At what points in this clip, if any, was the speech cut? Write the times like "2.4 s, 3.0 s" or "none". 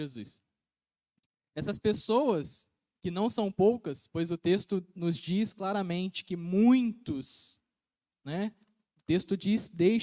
none